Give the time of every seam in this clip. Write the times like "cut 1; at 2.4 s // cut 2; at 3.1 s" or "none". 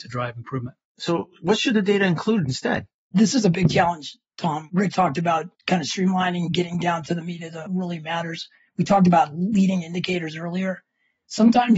cut 1; at 4.9 s // cut 2; at 7.7 s